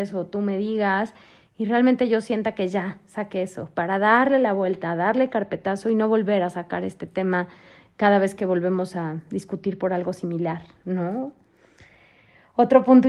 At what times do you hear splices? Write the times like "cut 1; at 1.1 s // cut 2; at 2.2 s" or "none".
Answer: none

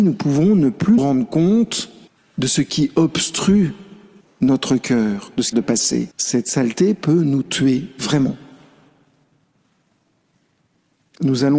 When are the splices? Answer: cut 1; at 1.0 s // cut 2; at 2.1 s // cut 3; at 4.2 s // cut 4; at 5.5 s // cut 5; at 6.1 s

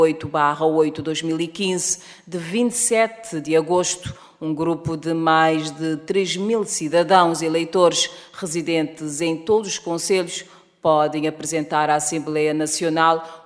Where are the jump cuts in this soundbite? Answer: none

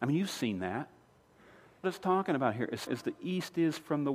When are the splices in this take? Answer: cut 1; at 1.8 s // cut 2; at 2.9 s

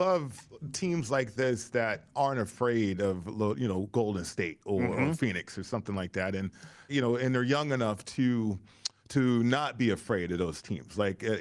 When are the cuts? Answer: cut 1; at 6.9 s

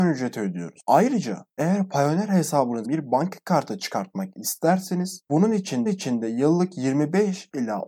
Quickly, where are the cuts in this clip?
cut 1; at 2.8 s // cut 2; at 5.9 s

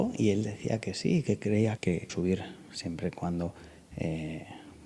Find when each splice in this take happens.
cut 1; at 1.8 s // cut 2; at 2.1 s

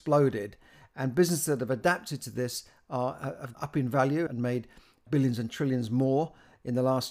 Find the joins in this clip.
cut 1; at 3.5 s // cut 2; at 4.3 s // cut 3; at 5.1 s

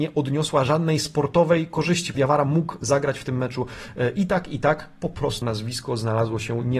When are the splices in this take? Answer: cut 1; at 2.1 s // cut 2; at 5.4 s

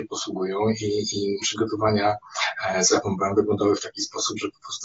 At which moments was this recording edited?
cut 1; at 1.4 s

